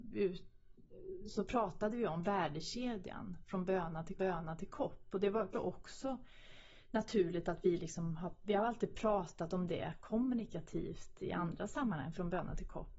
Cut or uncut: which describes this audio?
cut